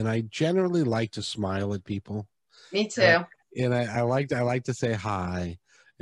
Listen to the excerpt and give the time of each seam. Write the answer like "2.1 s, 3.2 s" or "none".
none